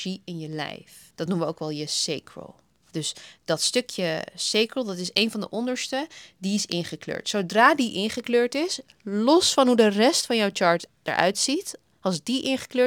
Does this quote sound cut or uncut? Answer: uncut